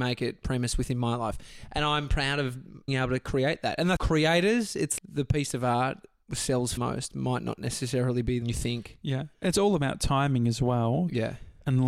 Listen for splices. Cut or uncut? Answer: cut